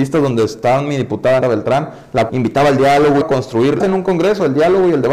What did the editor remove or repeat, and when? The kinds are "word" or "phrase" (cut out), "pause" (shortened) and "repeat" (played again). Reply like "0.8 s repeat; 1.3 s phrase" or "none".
1.4 s word; 2.3 s word; 3.2 s word; 3.8 s phrase